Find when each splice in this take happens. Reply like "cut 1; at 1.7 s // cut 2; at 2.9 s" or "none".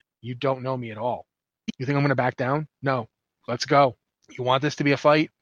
none